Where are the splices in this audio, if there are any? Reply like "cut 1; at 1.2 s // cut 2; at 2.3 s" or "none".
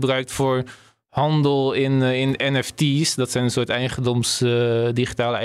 none